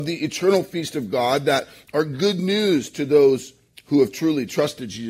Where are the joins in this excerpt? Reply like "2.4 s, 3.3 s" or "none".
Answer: 3.7 s